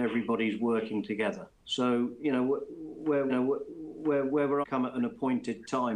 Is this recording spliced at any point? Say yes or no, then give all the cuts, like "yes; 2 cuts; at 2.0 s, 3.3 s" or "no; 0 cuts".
yes; 3 cuts; at 1.5 s, 3.3 s, 4.6 s